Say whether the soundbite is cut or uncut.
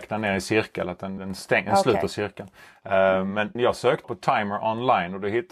cut